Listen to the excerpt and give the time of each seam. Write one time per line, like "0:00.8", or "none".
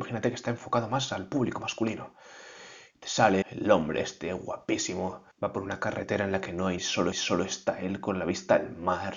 0:03.4
0:05.3
0:06.8
0:07.1